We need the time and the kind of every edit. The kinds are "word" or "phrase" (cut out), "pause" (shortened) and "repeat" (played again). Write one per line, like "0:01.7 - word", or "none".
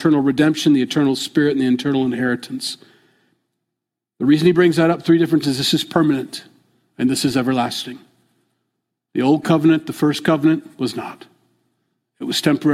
0:05.4 - word